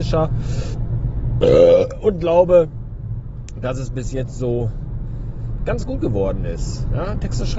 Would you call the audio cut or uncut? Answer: uncut